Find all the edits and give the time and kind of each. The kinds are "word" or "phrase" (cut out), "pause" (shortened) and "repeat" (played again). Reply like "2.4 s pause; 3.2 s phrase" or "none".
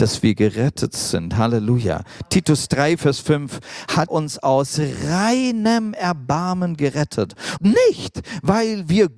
4.1 s word; 7.6 s word